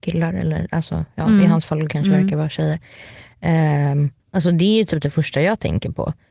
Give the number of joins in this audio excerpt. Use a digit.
1